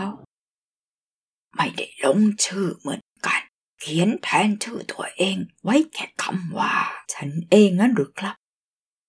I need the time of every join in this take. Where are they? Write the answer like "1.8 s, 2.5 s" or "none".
3.6 s, 7.0 s